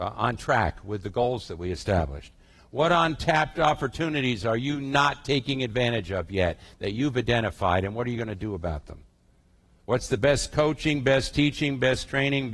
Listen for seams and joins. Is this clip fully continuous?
yes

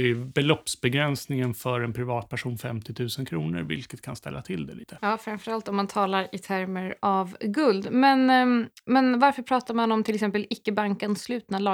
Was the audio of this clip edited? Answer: no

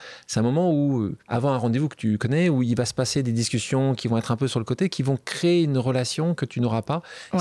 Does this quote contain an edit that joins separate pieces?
yes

